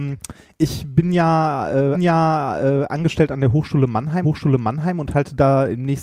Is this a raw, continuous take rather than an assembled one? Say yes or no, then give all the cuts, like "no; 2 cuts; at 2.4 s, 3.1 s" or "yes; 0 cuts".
no; 2 cuts; at 1.9 s, 4.2 s